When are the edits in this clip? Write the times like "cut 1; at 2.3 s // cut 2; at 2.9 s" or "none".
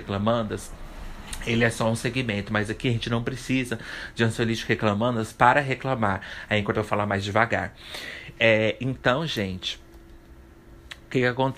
cut 1; at 6.7 s